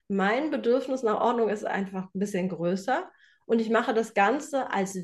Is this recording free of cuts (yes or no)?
yes